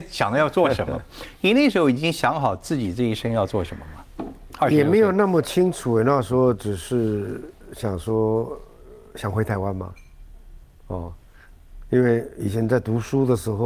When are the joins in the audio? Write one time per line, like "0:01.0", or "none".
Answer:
none